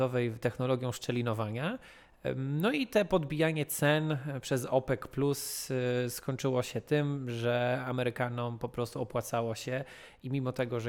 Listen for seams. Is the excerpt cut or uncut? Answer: uncut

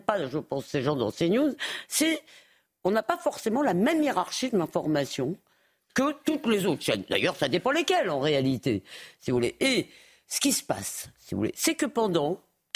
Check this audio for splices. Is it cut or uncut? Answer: uncut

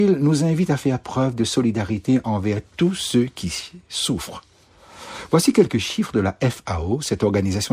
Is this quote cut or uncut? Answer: uncut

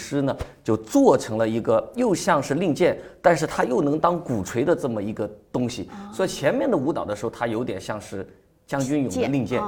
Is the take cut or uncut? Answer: uncut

